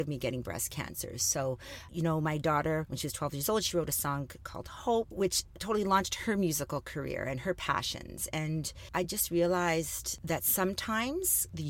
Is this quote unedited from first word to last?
yes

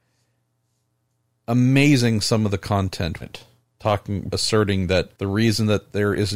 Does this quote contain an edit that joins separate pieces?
yes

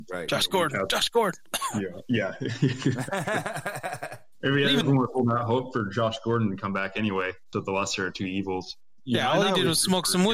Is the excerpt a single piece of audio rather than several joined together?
no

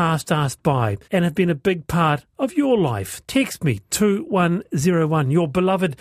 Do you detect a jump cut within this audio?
yes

